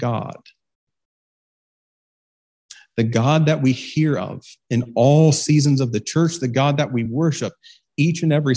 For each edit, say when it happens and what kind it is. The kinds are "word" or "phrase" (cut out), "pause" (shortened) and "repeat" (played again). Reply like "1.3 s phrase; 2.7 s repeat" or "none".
none